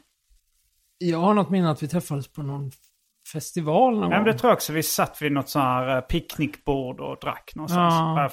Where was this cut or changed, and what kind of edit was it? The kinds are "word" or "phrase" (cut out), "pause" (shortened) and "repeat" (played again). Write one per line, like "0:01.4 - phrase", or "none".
none